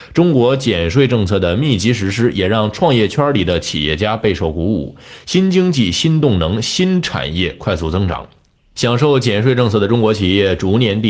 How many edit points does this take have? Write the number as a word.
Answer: zero